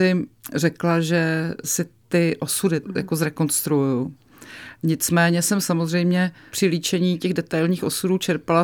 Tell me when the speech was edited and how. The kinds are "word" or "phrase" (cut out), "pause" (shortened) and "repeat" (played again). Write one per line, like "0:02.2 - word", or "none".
none